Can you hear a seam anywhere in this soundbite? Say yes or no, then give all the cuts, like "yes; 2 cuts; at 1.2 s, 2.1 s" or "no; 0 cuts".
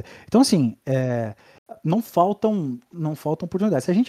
no; 0 cuts